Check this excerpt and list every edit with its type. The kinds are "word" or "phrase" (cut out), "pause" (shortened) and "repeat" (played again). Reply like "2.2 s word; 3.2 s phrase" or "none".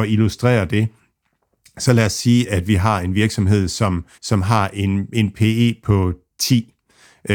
4.1 s pause